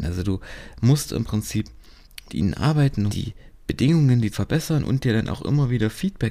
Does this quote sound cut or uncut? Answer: cut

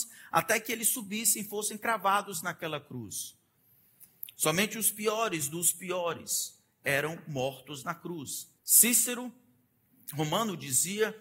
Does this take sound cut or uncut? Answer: cut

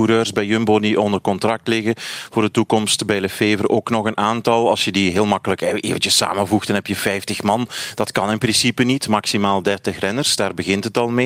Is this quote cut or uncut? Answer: uncut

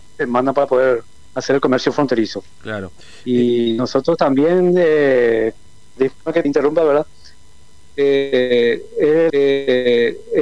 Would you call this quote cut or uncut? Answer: cut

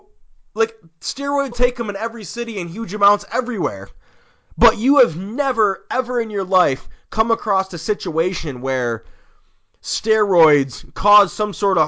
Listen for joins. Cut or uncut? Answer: cut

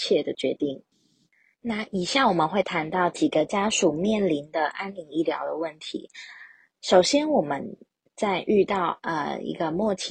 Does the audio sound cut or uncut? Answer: uncut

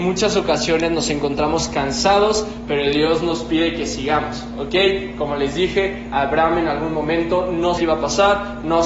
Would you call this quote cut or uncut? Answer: cut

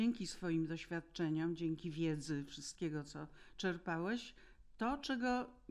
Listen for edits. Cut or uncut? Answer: uncut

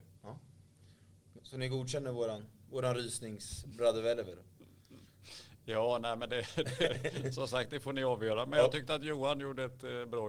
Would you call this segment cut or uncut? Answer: uncut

